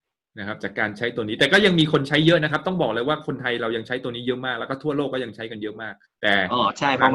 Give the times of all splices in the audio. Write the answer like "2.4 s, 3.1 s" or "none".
6.0 s